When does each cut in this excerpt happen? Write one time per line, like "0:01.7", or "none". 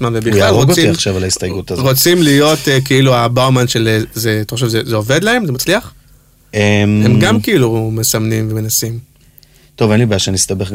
none